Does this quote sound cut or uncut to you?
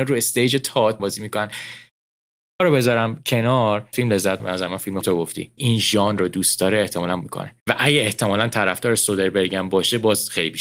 cut